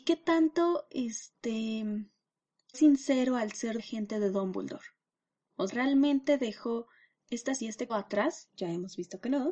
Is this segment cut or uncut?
cut